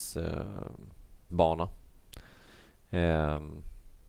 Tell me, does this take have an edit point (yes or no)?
yes